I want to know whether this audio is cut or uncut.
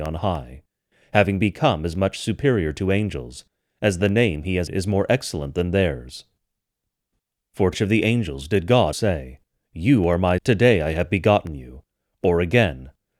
cut